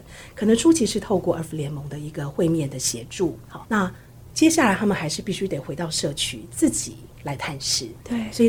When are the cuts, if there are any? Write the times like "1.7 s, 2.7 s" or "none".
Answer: 3.6 s